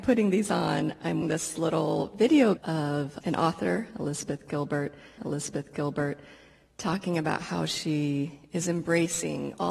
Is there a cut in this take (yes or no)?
yes